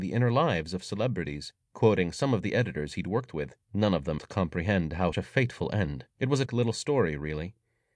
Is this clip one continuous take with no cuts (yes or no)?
no